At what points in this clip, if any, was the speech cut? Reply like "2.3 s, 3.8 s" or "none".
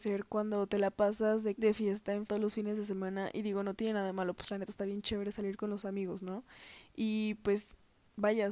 1.5 s, 2.3 s, 4.4 s